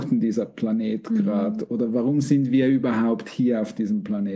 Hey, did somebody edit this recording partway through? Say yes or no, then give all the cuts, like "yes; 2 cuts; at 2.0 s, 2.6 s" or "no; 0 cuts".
no; 0 cuts